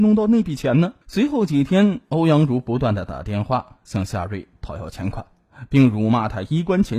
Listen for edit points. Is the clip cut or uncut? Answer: cut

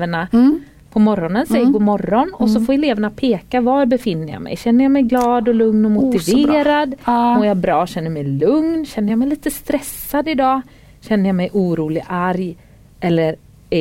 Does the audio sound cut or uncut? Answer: uncut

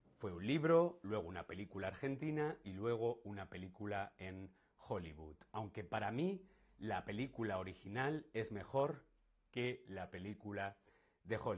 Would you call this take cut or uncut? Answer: uncut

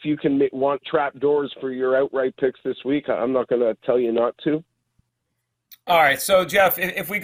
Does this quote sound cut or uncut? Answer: uncut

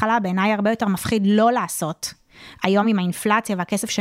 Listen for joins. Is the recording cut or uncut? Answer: uncut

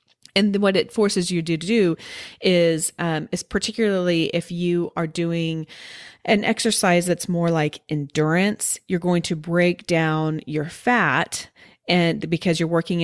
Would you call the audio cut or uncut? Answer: uncut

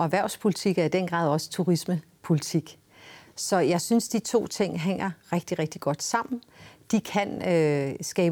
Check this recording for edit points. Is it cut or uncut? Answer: uncut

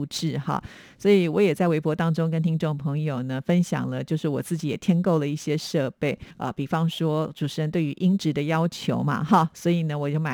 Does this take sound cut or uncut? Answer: cut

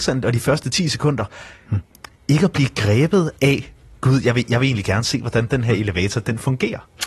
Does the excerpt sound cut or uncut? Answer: uncut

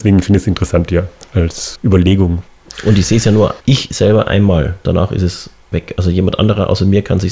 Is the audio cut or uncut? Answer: cut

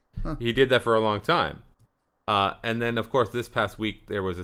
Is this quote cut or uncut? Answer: uncut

